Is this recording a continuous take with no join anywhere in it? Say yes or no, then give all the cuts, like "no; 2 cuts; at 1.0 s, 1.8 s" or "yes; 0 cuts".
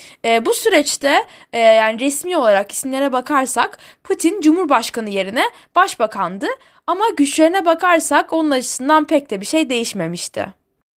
yes; 0 cuts